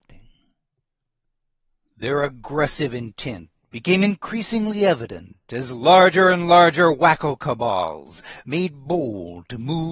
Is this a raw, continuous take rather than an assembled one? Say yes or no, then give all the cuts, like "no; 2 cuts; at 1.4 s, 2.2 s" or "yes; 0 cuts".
yes; 0 cuts